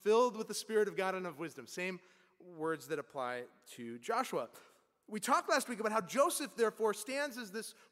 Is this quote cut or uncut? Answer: uncut